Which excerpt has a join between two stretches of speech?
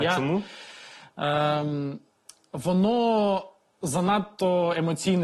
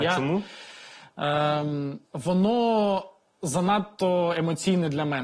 second; 1 cut; at 2.1 s

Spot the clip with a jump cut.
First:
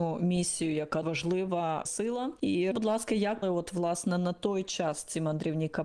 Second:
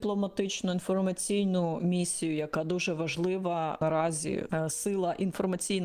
first; 4 cuts; at 1.0 s, 1.9 s, 2.7 s, 3.4 s

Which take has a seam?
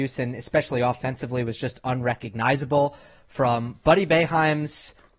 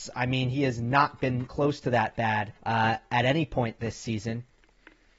second; 2 cuts; at 1.5 s, 2.6 s

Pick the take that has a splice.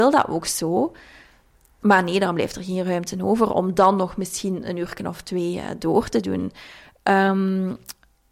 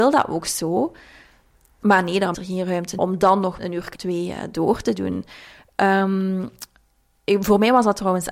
second; 4 cuts; at 2.3 s, 3.0 s, 3.6 s, 3.9 s

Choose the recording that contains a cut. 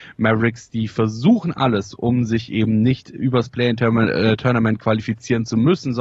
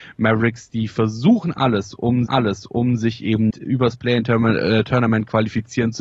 second; 2 cuts; at 2.3 s, 3.5 s

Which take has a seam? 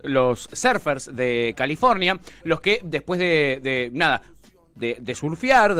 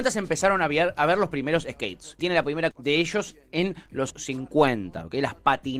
second; 3 cuts; at 2.2 s, 2.7 s, 4.1 s

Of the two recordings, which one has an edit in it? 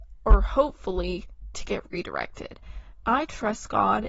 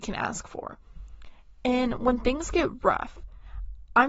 first; 2 cuts; at 1.5 s, 3.0 s

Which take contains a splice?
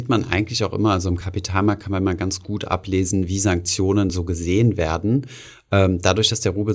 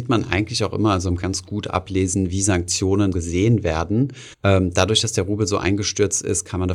second; 3 cuts; at 1.2 s, 3.1 s, 4.3 s

